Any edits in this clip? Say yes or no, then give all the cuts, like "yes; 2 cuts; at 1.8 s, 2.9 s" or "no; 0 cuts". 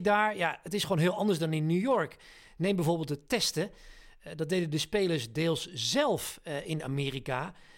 no; 0 cuts